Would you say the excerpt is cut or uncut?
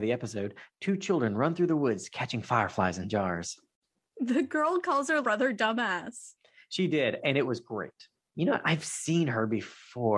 cut